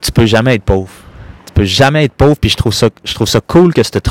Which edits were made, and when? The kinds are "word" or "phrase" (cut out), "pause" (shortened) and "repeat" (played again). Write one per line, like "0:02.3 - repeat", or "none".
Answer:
0:01.4 - pause